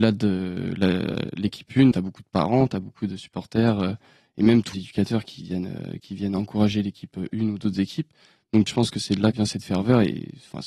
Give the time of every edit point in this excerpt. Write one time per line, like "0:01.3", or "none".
0:01.9
0:04.7
0:08.7
0:09.3